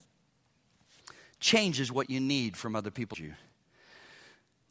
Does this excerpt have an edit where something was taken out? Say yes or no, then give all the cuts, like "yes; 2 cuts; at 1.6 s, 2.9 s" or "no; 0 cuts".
yes; 1 cut; at 3.1 s